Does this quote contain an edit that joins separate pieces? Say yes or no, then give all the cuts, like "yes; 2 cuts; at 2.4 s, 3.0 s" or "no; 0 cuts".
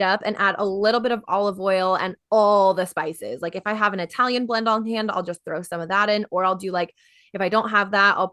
no; 0 cuts